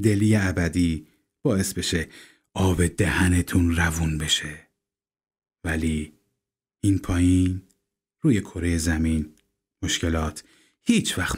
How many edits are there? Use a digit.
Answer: 0